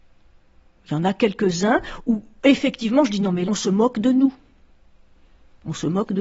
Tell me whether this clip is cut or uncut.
cut